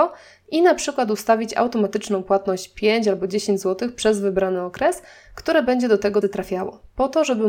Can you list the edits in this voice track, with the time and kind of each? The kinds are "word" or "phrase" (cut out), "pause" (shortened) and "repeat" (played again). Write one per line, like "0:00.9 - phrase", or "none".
0:06.2 - word